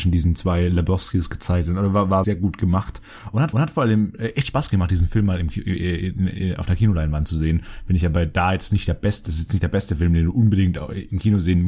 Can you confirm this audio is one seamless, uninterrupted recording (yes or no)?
no